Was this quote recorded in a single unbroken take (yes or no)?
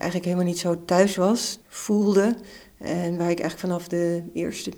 no